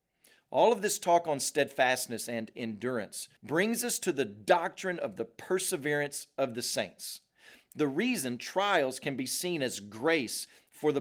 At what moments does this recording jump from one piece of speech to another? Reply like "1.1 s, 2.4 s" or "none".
3.4 s

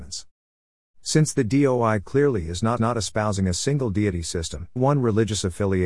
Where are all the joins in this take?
2.8 s, 4.8 s

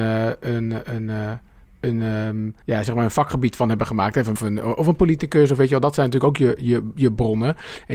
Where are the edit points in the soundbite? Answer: 2.6 s, 4.4 s

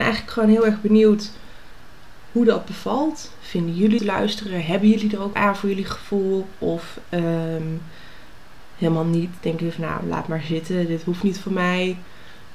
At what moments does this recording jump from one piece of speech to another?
4.0 s, 5.3 s

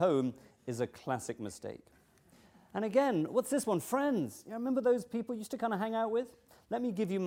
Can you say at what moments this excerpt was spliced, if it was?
none

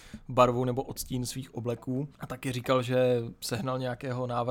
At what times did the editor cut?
2.1 s

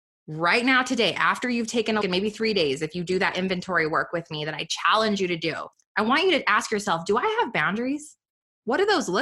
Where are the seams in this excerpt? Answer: 2.0 s, 5.7 s

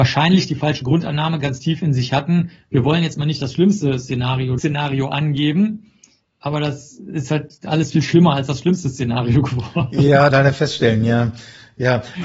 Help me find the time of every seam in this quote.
4.6 s, 10.3 s

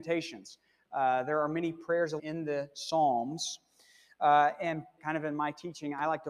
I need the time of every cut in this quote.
2.2 s, 5.0 s

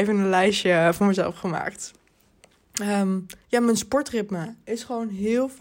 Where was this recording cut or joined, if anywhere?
3.4 s

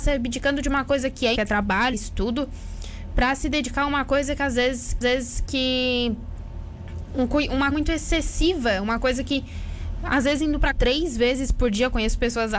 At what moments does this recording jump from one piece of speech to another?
1.3 s, 1.9 s, 5.0 s, 7.7 s, 10.7 s

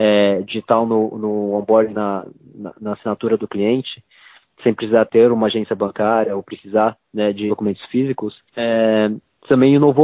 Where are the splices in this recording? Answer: 1.9 s, 5.1 s, 7.0 s, 7.5 s, 8.5 s

